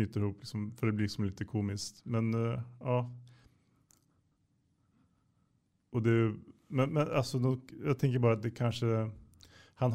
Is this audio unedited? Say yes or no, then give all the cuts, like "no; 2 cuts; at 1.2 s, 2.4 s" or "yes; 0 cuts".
yes; 0 cuts